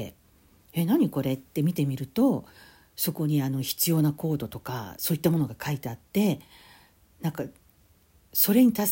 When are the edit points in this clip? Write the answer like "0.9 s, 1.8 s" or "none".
none